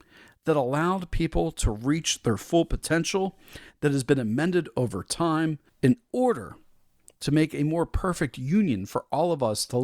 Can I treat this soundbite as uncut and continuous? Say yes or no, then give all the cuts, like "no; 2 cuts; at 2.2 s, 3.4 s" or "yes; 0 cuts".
no; 1 cut; at 5.7 s